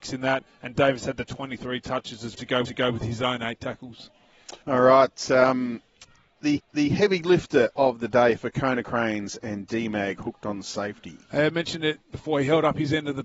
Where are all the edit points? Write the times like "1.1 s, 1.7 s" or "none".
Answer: 2.3 s, 2.6 s, 4.6 s, 6.6 s, 11.2 s